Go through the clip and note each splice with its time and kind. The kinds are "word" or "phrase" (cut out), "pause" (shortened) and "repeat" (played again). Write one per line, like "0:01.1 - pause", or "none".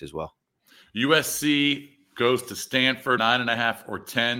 0:03.2 - word